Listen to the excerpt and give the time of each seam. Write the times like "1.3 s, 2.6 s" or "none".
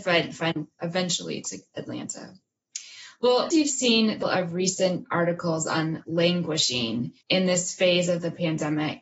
3.5 s, 4.2 s, 7.2 s